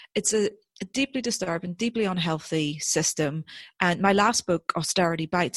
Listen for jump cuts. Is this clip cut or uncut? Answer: uncut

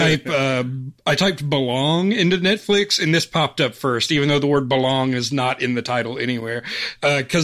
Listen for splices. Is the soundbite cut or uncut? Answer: uncut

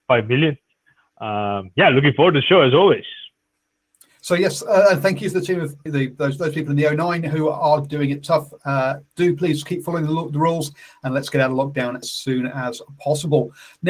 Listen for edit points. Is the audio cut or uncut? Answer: cut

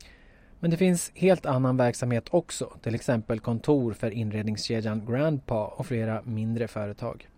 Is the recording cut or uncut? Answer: uncut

